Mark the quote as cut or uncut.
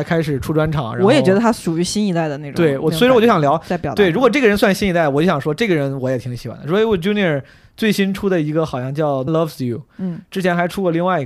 cut